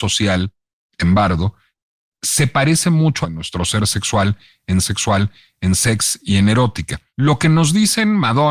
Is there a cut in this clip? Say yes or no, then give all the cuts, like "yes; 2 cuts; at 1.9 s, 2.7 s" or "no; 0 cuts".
yes; 2 cuts; at 3.2 s, 4.8 s